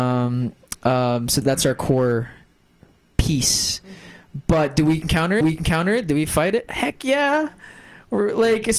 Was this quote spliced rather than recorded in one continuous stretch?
yes; 2 cuts; at 1.4 s, 5.4 s

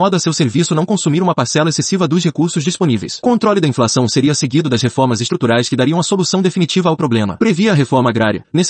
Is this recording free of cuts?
yes; 0 cuts

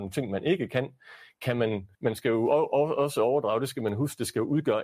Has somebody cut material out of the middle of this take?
yes; 1 cut; at 1.9 s

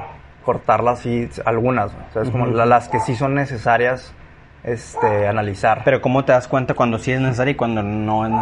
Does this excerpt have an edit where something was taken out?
no; 0 cuts

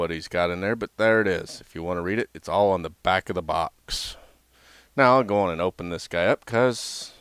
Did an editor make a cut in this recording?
no; 0 cuts

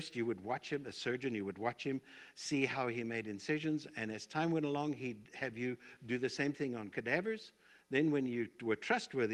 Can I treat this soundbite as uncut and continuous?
yes; 0 cuts

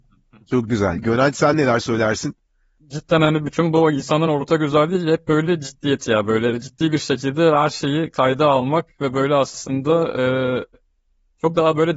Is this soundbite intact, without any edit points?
yes; 0 cuts

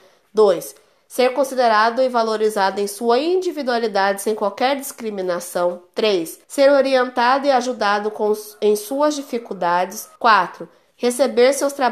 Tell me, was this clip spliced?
yes; 2 cuts; at 6.4 s, 10.2 s

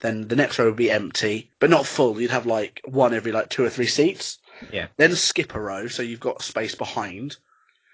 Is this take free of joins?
no; 1 cut; at 1.5 s

